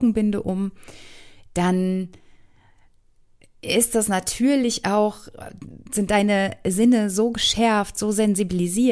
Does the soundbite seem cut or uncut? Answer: uncut